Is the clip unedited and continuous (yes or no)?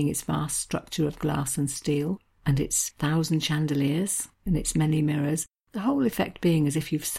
no